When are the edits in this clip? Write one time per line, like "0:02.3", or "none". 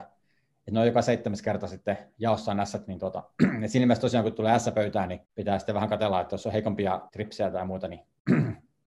0:05.2
0:07.1